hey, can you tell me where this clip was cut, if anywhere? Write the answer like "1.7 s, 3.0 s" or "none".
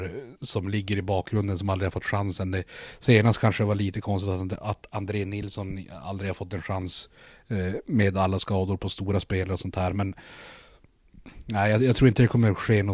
none